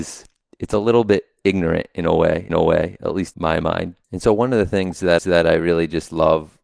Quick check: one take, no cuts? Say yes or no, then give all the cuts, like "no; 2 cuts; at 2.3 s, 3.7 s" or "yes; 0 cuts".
no; 4 cuts; at 2.5 s, 3.3 s, 4.0 s, 5.2 s